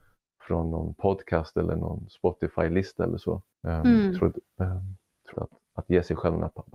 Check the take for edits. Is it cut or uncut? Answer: cut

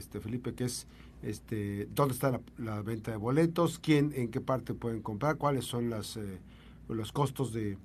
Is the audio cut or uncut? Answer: uncut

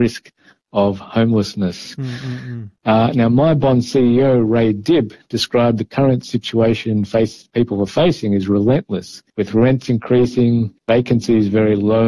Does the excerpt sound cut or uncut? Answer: cut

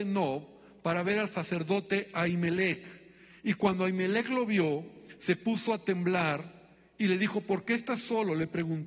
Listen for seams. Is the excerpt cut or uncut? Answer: uncut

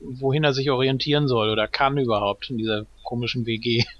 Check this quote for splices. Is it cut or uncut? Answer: uncut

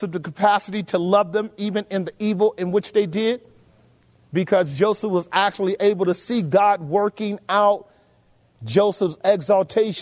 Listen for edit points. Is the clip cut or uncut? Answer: uncut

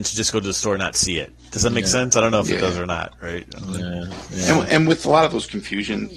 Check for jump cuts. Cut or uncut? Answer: cut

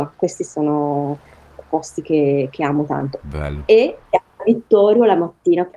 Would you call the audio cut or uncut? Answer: uncut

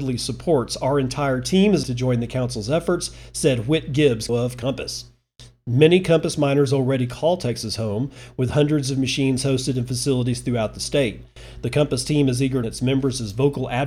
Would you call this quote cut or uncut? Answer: cut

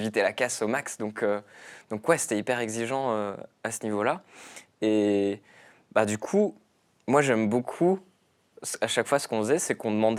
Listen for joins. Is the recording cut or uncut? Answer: uncut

